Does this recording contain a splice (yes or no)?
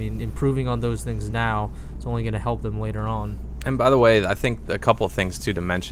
no